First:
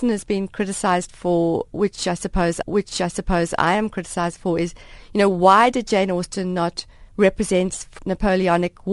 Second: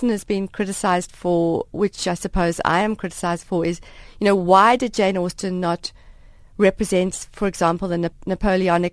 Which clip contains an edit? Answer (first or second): first